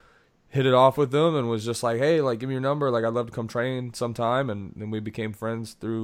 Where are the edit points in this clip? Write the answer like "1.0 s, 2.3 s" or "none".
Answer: none